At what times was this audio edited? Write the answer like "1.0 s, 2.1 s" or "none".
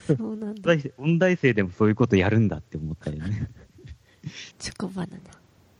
4.5 s